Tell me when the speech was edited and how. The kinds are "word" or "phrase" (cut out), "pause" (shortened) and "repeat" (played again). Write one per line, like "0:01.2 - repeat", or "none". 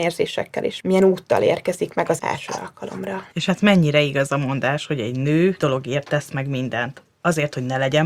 0:02.2 - word
0:03.3 - pause
0:05.6 - word